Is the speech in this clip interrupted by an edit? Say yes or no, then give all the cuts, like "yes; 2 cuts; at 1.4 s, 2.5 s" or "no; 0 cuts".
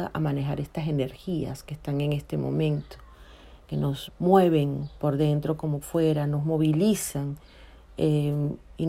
yes; 3 cuts; at 4.1 s, 5.0 s, 5.8 s